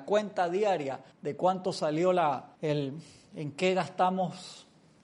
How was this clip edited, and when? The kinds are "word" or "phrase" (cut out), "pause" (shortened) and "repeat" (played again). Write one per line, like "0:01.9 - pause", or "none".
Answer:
0:01.1 - pause
0:02.6 - pause